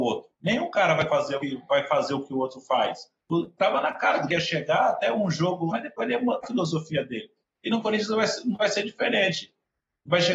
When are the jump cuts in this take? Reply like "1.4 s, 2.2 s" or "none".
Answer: 1.1 s, 1.4 s, 4.3 s, 5.7 s, 6.4 s